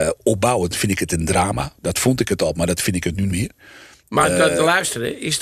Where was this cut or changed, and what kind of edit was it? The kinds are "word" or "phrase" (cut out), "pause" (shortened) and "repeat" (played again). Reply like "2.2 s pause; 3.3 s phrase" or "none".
3.3 s word